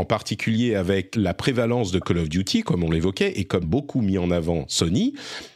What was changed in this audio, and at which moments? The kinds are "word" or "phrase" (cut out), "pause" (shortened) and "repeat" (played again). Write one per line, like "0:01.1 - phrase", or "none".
0:01.1 - word
0:03.6 - word